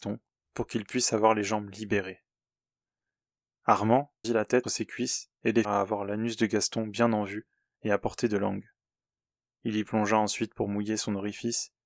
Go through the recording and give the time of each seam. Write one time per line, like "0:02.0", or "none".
0:04.2
0:04.6
0:05.6